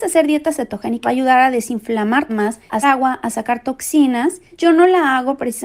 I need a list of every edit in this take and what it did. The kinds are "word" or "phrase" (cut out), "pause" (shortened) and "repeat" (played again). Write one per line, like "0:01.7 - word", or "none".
0:01.0 - phrase
0:02.3 - word
0:02.8 - word